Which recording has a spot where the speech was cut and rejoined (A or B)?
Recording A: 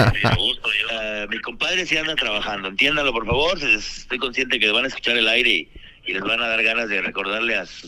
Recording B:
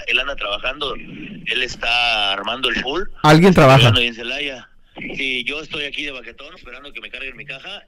B